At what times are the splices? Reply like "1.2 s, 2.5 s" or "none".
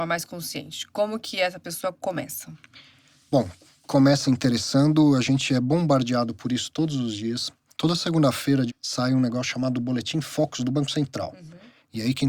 4.2 s, 8.7 s

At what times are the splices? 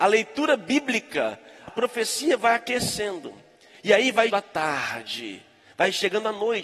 1.7 s, 4.3 s

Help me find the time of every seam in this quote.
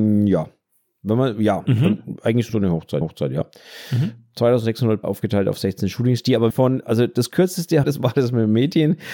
2.5 s, 3.0 s, 5.0 s, 6.5 s, 7.8 s

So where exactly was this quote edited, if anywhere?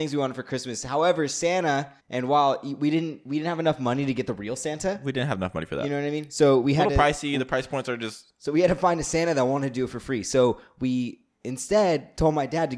2.0 s

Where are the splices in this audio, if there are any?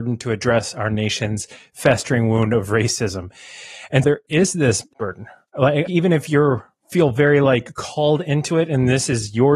4.0 s, 5.9 s

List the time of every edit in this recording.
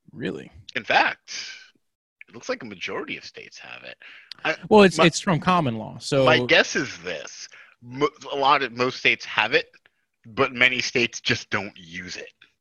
none

